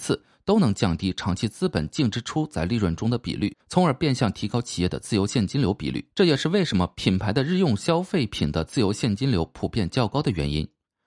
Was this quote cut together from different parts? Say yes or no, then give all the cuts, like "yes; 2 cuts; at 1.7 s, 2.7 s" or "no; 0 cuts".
yes; 2 cuts; at 3.6 s, 6.1 s